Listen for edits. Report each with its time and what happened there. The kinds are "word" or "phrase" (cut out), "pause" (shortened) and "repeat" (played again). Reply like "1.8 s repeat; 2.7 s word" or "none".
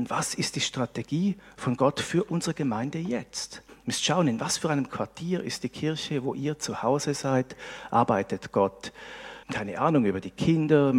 3.7 s pause; 9.4 s pause

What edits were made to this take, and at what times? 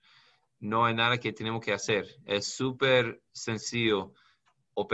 3.3 s pause

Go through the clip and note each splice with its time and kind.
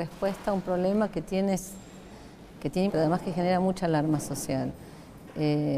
2.9 s word

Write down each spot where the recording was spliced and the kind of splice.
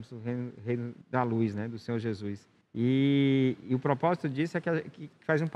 1.0 s pause; 2.6 s pause

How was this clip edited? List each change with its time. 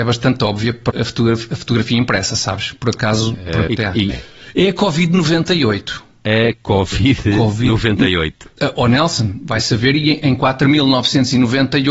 0.9 s phrase; 3.7 s word; 4.1 s phrase

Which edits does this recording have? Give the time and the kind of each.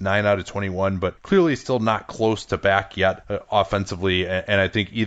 none

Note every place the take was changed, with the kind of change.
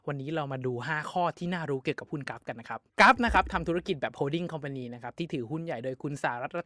2.9 s pause

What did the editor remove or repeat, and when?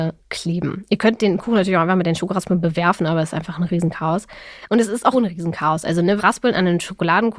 5.1 s word; 6.2 s phrase

